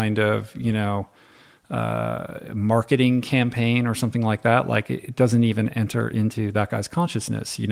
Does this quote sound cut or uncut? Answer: uncut